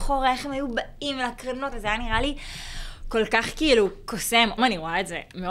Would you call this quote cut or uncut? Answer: cut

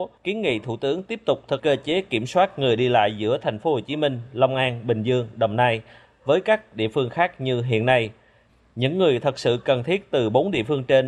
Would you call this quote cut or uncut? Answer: cut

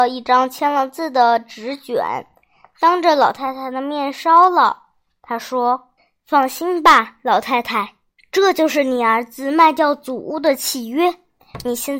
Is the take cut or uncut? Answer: cut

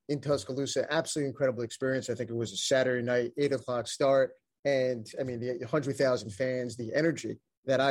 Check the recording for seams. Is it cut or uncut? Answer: uncut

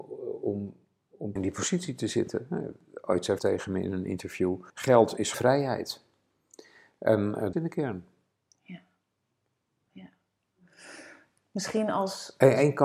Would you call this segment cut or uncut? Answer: cut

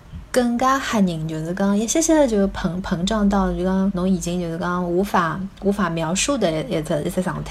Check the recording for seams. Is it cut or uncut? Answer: cut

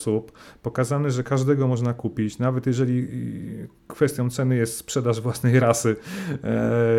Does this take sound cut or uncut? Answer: uncut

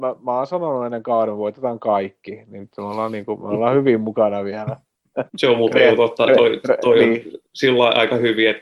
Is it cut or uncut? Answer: cut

